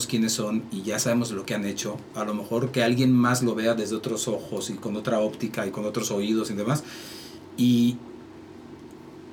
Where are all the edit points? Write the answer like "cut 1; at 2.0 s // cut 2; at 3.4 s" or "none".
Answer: none